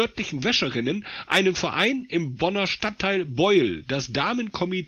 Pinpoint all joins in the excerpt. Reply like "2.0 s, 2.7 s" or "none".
none